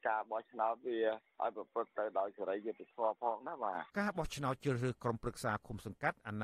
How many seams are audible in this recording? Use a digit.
1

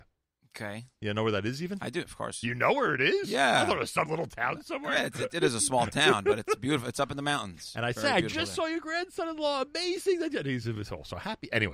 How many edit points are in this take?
1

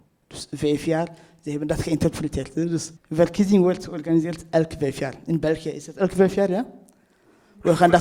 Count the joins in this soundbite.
1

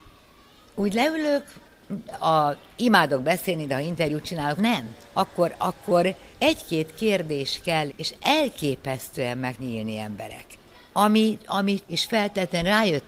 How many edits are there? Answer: 8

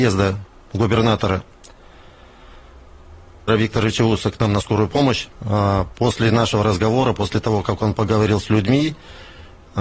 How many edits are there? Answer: 2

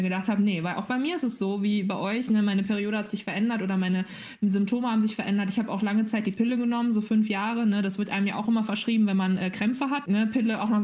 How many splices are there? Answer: 0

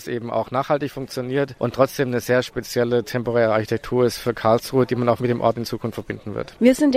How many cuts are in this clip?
1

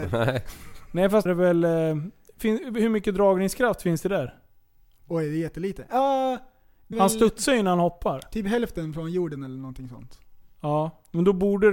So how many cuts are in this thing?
2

